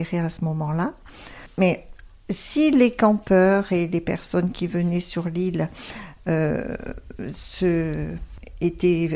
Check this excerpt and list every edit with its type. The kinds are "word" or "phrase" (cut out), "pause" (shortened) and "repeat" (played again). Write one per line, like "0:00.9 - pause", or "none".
none